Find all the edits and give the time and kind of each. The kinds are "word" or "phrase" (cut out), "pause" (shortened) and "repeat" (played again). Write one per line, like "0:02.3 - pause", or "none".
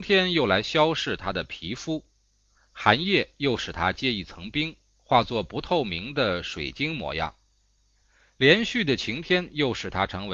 none